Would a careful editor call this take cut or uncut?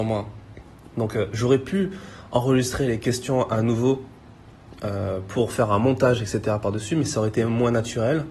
uncut